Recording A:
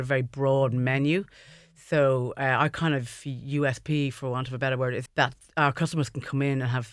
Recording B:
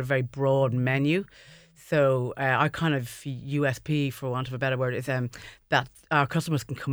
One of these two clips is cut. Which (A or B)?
A